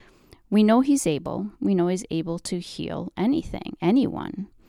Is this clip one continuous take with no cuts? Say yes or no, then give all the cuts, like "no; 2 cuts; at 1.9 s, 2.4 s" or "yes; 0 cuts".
no; 1 cut; at 1.5 s